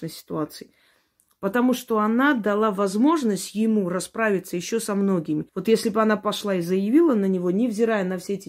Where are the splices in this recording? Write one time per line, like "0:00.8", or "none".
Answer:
0:05.5